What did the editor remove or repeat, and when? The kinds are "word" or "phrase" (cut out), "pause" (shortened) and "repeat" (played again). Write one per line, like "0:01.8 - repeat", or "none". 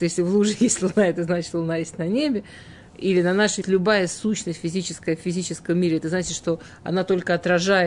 0:03.6 - phrase